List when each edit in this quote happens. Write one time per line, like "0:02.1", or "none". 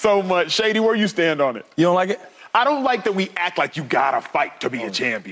none

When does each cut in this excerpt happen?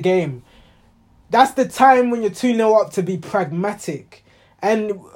none

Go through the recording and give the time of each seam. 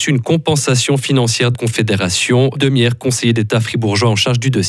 0:01.5
0:02.5

